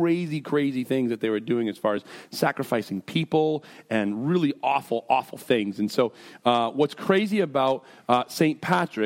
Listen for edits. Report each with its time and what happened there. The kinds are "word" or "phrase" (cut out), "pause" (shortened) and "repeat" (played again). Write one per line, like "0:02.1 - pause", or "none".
none